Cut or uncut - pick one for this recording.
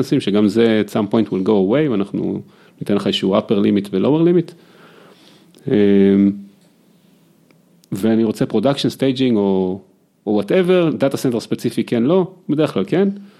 uncut